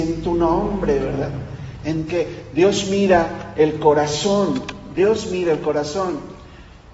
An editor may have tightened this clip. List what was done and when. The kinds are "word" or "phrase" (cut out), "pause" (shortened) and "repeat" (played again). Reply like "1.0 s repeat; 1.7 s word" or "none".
2.1 s phrase